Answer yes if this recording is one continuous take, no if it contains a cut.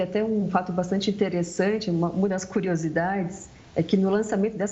yes